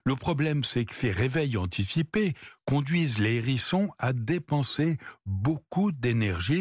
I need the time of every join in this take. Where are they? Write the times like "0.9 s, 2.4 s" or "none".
none